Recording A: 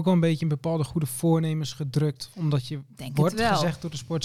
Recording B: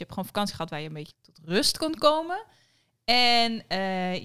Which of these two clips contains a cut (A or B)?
B